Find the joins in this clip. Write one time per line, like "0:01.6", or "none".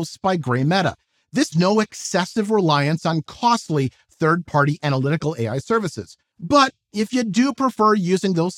0:01.5